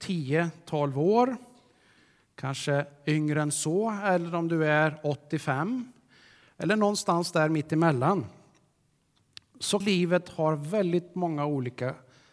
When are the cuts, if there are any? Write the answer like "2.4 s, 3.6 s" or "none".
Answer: 9.8 s